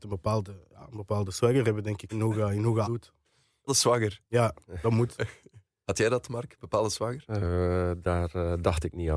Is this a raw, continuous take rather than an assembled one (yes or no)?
no